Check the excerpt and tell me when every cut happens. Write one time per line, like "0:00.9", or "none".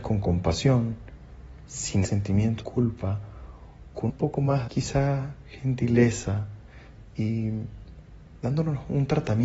0:02.0
0:02.6
0:04.1
0:04.7